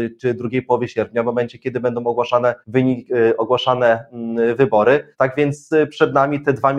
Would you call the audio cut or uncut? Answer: cut